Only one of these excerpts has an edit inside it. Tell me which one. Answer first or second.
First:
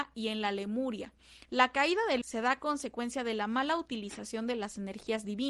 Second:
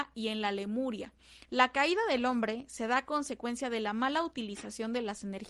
first